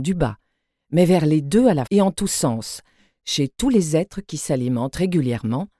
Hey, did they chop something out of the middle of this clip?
yes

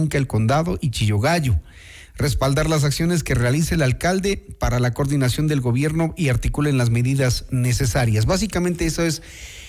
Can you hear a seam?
no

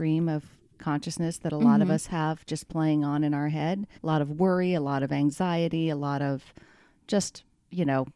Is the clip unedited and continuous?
no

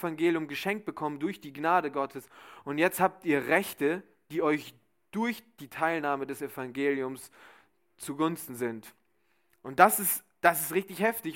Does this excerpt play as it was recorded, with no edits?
yes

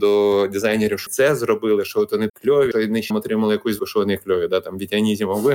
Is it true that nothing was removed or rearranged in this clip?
no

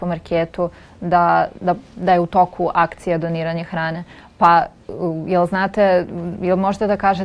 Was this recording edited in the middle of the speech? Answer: no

